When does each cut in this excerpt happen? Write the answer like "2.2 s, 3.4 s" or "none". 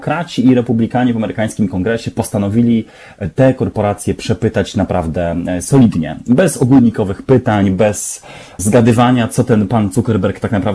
8.6 s